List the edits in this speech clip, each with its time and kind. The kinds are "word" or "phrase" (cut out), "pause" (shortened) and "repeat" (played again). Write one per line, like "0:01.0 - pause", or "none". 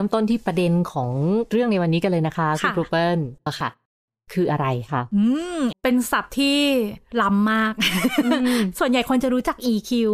0:03.5 - word
0:05.7 - word